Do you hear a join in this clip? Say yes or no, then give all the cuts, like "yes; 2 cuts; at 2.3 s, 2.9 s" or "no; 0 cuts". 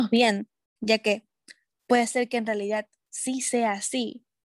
no; 0 cuts